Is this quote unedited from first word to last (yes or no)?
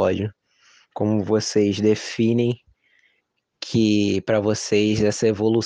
yes